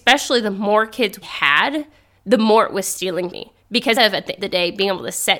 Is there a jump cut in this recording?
yes; 4 cuts; at 1.2 s, 3.3 s, 4.0 s, 4.4 s

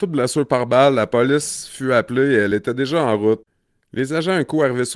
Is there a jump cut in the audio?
no; 0 cuts

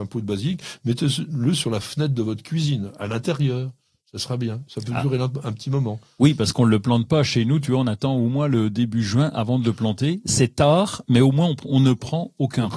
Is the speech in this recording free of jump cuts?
yes; 0 cuts

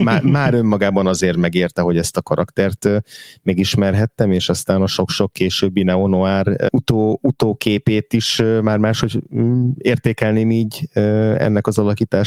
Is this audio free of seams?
yes; 0 cuts

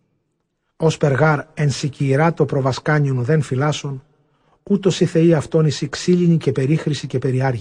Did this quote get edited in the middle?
no; 0 cuts

